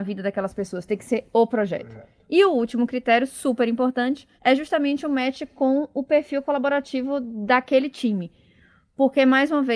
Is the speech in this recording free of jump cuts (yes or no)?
no